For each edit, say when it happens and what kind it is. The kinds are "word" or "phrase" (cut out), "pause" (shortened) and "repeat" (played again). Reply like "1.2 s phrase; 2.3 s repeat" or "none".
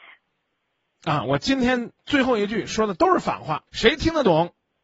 2.0 s pause; 3.7 s pause

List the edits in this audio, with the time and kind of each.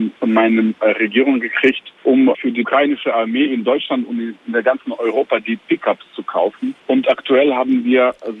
none

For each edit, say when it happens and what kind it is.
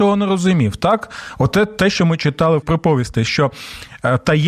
2.6 s word

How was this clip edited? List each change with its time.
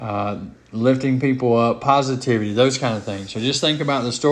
none

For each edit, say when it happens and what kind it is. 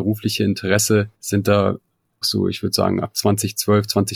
1.2 s pause; 2.2 s word

